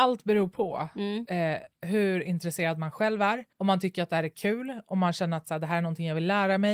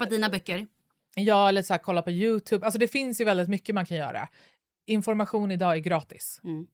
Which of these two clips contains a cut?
first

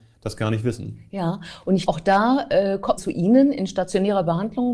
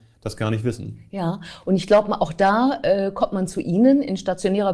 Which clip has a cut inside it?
first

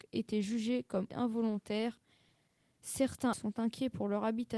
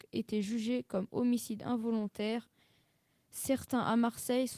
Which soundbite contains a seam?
first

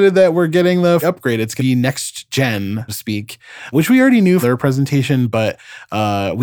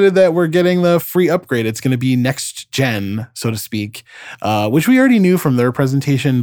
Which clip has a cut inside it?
first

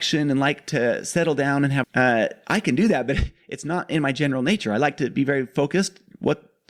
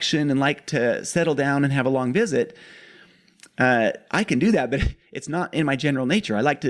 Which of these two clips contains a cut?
first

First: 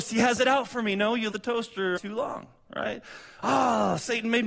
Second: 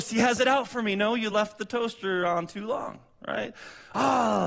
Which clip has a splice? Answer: first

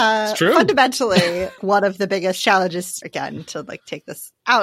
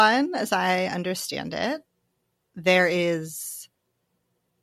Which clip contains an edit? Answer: first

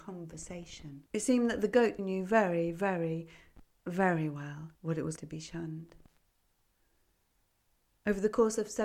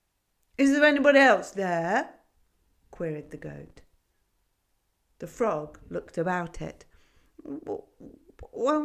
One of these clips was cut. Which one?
first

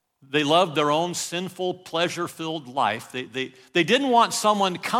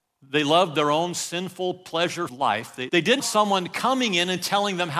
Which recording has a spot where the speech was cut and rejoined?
second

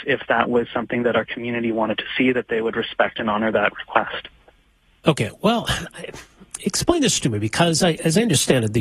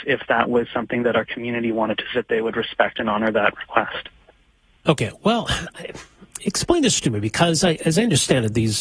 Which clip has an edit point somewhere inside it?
second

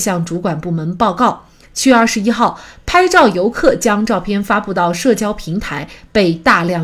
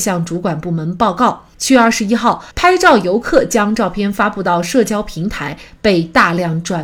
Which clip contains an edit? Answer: second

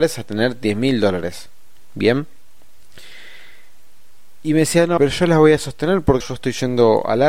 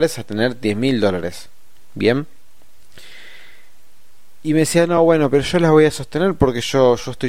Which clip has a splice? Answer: first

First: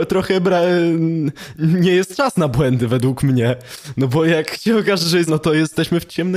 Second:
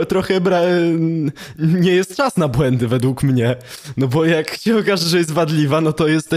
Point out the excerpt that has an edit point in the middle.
first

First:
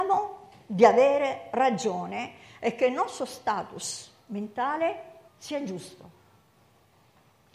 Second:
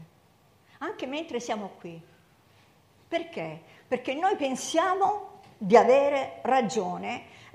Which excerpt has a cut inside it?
first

